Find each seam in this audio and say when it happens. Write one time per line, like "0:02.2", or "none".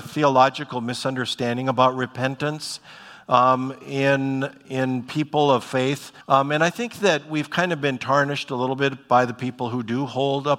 0:06.2

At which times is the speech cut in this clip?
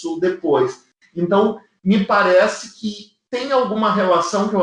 none

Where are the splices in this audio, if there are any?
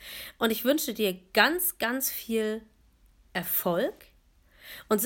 none

